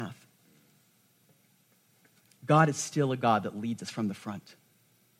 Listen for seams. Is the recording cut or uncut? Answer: uncut